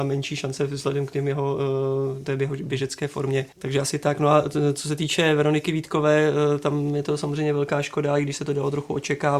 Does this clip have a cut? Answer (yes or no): yes